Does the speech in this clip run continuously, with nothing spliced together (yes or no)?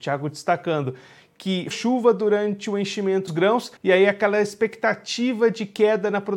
no